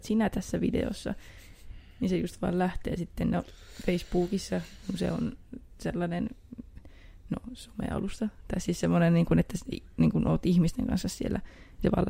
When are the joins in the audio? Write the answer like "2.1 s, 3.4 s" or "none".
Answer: none